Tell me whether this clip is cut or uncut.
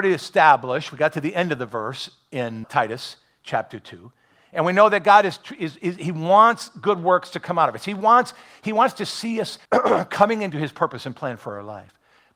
cut